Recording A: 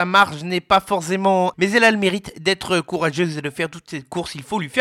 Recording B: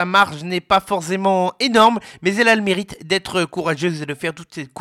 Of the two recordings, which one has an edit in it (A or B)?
A